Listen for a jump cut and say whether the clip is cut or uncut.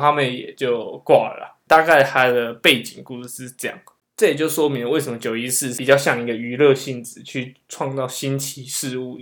uncut